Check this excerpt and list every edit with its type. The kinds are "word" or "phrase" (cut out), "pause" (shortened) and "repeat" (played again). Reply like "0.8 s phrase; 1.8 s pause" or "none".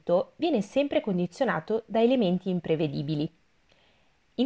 none